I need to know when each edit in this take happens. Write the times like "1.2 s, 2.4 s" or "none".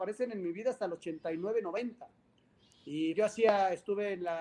3.1 s